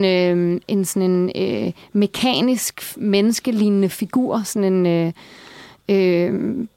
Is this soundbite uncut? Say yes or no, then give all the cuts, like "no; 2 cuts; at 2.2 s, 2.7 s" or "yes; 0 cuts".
yes; 0 cuts